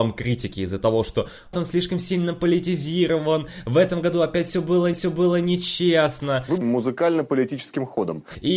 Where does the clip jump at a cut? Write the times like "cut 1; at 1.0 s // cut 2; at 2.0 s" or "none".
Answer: cut 1; at 1.5 s // cut 2; at 4.9 s // cut 3; at 6.6 s

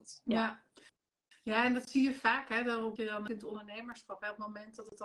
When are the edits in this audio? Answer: cut 1; at 3.0 s // cut 2; at 3.3 s

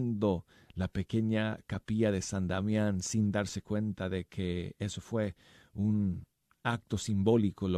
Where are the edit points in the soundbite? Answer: none

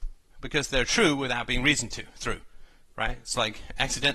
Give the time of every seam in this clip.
none

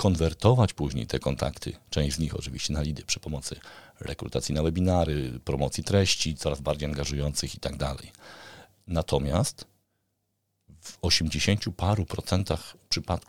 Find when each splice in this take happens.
none

